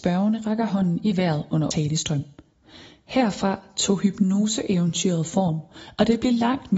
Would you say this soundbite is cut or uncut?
cut